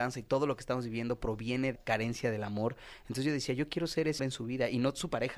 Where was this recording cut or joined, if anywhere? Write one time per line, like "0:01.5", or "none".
0:01.7
0:04.2